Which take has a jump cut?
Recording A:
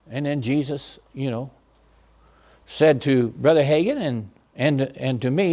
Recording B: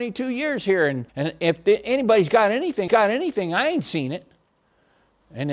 B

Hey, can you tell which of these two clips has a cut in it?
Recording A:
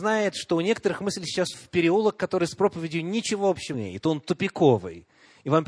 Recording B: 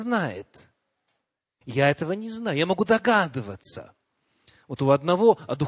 A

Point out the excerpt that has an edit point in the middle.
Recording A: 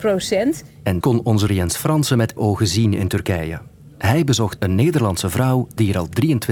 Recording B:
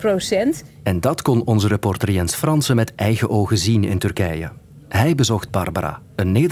A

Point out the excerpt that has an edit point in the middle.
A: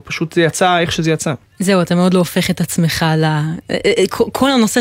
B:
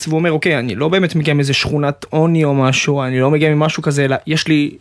A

